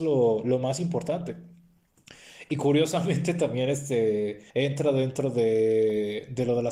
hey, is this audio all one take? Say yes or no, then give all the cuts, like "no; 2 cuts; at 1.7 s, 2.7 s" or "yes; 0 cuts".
no; 1 cut; at 4.5 s